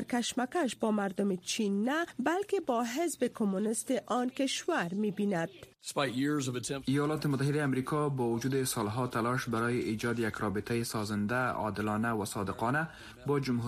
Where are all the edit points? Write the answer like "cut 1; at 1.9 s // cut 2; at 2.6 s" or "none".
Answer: none